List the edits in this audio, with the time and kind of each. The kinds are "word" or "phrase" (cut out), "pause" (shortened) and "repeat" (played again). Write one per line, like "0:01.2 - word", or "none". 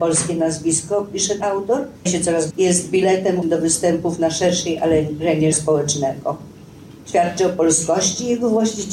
0:01.4 - word
0:02.1 - word
0:02.5 - word
0:03.4 - word
0:05.5 - word